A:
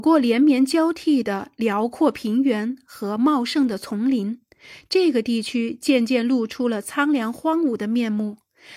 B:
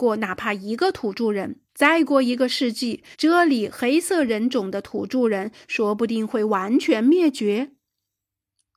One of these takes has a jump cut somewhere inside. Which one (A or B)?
B